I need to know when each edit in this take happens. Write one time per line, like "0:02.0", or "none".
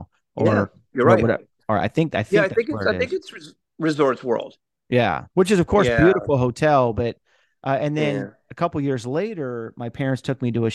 0:05.3

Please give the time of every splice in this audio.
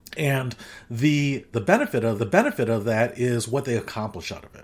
0:01.5
0:02.2

